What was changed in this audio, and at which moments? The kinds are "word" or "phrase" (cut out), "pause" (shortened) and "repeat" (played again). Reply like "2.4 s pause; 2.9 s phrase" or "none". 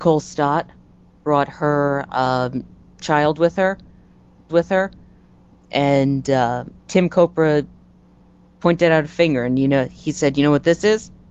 4.5 s repeat; 6.8 s pause